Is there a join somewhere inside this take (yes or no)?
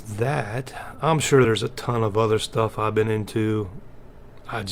no